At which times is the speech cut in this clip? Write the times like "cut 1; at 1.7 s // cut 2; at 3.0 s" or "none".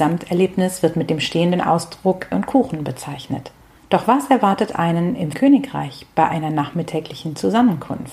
cut 1; at 2.3 s // cut 2; at 3.7 s // cut 3; at 5.3 s